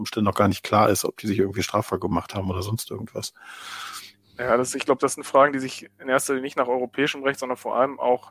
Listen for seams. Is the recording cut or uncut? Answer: uncut